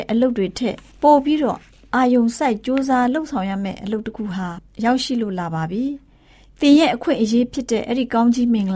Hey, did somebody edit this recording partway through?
no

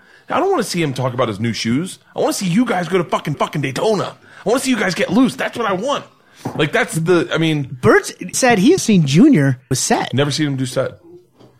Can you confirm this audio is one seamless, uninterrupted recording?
no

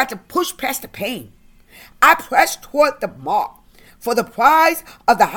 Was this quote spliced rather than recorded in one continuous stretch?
no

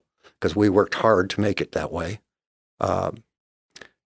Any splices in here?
no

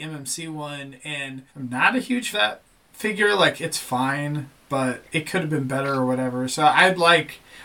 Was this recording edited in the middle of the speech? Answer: yes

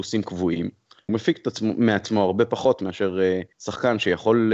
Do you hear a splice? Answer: yes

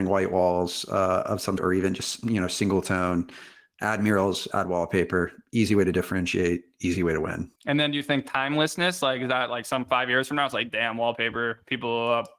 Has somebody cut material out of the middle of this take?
yes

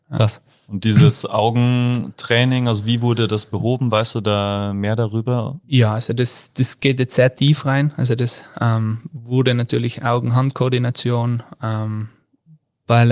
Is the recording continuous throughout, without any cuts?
no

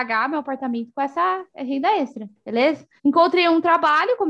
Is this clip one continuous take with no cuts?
no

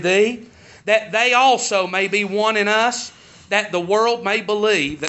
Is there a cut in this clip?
no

